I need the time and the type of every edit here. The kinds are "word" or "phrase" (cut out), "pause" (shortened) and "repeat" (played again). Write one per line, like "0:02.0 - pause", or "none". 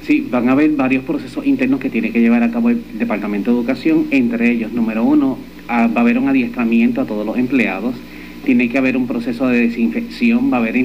none